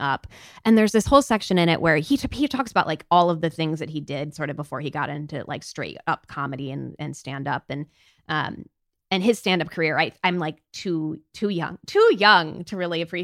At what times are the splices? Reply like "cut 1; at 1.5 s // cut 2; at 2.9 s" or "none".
none